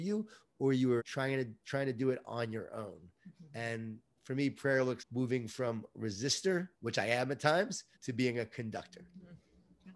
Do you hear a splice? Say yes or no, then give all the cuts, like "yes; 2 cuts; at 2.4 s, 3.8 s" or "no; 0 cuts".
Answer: yes; 4 cuts; at 1.0 s, 5.0 s, 6.7 s, 7.9 s